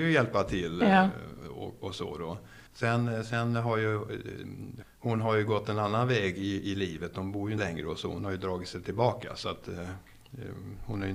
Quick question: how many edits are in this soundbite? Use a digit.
3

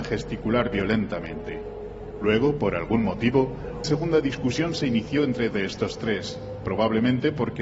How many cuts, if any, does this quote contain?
2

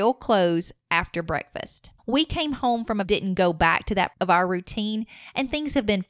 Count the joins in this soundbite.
3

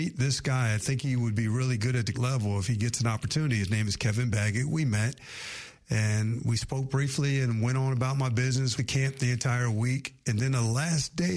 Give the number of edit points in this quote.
2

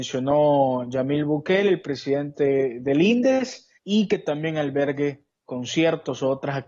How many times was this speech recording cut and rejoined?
1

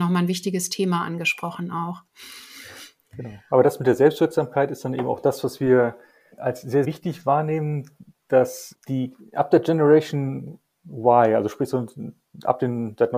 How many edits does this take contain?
3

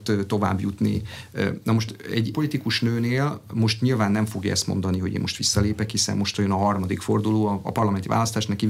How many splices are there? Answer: 1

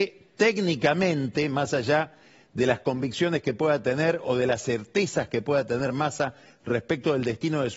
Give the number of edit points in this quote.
0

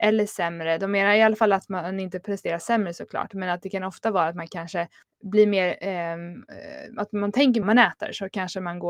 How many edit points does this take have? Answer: 2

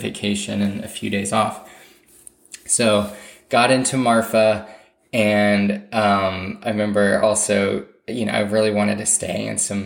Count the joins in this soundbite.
0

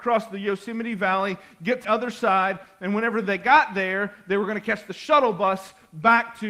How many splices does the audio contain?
1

